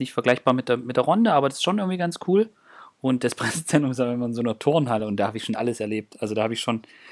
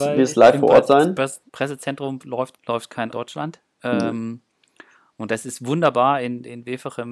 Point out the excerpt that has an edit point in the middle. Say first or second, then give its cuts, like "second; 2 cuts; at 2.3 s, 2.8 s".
second; 3 cuts; at 1.5 s, 2.6 s, 3.1 s